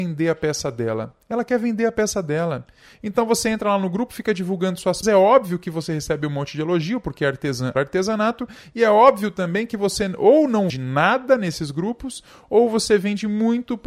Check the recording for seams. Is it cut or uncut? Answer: cut